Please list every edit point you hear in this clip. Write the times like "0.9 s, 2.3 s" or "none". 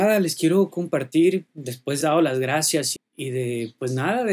1.5 s, 2.0 s, 3.0 s